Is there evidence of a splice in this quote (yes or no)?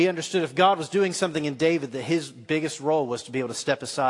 no